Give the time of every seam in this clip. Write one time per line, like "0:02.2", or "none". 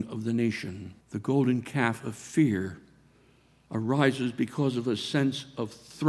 0:01.0

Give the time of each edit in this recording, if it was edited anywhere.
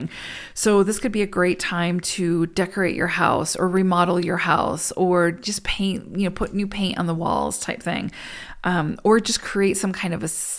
none

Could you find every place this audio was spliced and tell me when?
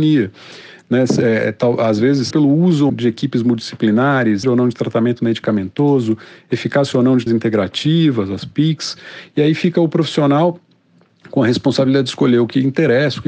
0:02.3
0:02.9
0:04.4
0:07.3

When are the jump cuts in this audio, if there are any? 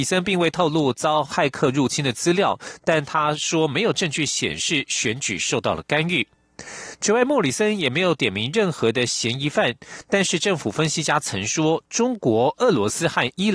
none

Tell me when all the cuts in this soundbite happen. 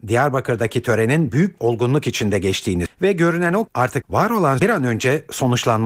0:01.6
0:02.9
0:03.7
0:04.0
0:04.6

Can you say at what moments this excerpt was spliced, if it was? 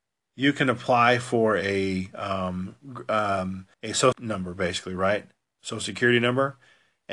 0:03.7
0:04.1

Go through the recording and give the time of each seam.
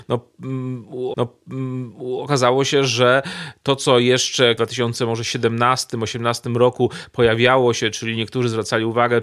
0:01.1
0:04.6

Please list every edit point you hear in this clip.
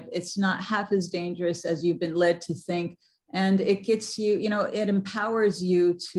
none

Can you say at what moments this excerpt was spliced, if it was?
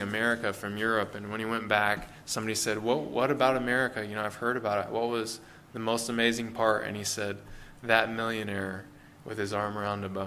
0:09.1

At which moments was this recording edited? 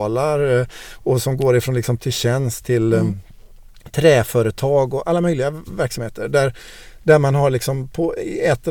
0:02.0

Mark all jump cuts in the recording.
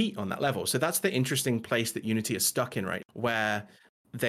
0:03.0

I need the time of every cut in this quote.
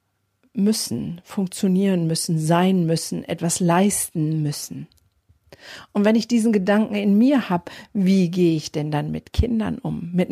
none

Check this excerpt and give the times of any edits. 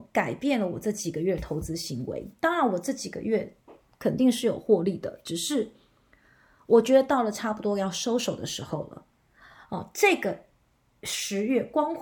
none

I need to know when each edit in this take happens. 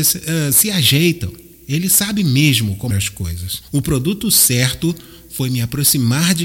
0:02.9

